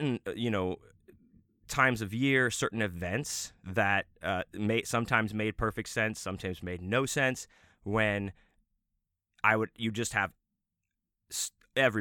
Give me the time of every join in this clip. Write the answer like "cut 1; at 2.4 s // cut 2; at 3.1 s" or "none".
none